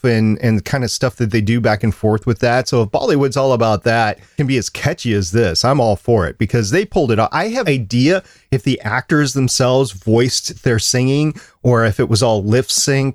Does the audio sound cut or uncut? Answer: cut